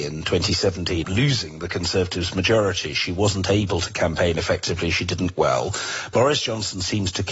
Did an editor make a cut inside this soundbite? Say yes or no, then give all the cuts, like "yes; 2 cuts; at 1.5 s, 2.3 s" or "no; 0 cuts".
yes; 2 cuts; at 1.0 s, 5.3 s